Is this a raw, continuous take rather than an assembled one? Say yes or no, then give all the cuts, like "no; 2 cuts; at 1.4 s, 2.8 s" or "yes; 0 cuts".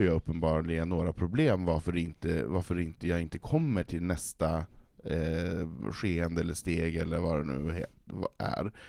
yes; 0 cuts